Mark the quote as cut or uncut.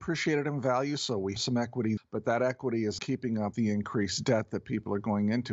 cut